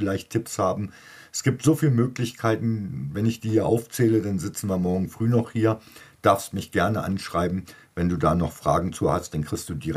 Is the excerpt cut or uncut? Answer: uncut